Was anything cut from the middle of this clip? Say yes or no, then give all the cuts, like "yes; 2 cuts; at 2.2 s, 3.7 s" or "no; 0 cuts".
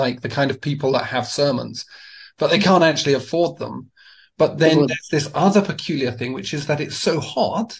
no; 0 cuts